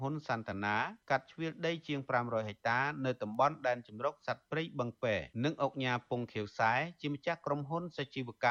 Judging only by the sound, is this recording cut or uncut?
cut